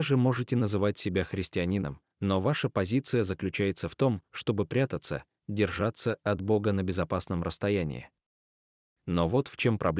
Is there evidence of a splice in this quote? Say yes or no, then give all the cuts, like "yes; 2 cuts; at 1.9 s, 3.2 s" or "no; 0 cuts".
no; 0 cuts